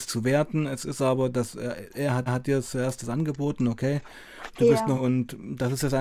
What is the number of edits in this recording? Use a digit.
2